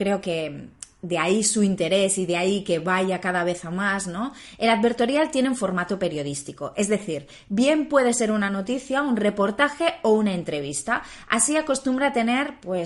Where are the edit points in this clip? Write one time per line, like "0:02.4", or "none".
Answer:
none